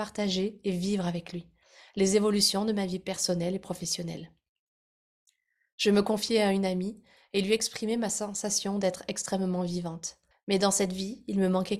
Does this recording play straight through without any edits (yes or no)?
no